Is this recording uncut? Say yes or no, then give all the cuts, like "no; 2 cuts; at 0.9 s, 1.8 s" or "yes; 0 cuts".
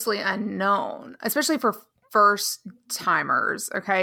yes; 0 cuts